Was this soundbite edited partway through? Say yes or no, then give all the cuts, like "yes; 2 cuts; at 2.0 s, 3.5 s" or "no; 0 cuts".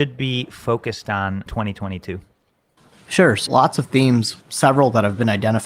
yes; 3 cuts; at 1.5 s, 3.5 s, 4.4 s